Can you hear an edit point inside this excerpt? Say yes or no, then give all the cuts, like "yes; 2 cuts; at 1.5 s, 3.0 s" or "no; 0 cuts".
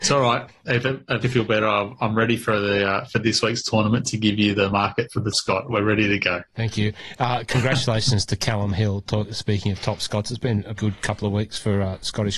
yes; 3 cuts; at 1.2 s, 5.3 s, 10.8 s